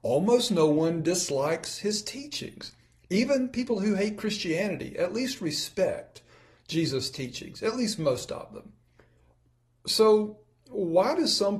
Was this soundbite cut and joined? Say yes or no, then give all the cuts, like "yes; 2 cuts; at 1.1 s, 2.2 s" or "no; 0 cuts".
no; 0 cuts